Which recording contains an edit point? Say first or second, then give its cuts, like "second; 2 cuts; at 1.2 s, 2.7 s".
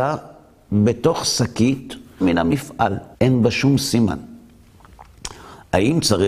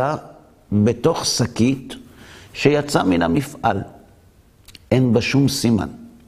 first; 2 cuts; at 2.2 s, 3.1 s